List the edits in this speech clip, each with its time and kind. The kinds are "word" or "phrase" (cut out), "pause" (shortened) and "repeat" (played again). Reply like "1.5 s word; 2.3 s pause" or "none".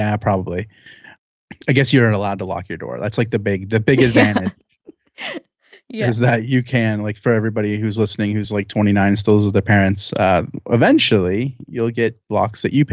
none